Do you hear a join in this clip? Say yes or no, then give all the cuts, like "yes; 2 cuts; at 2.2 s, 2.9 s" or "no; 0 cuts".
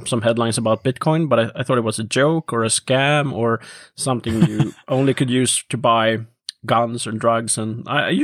no; 0 cuts